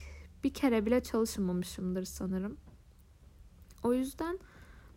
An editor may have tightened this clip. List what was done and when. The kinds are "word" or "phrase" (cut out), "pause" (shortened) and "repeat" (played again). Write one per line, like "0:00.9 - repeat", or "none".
none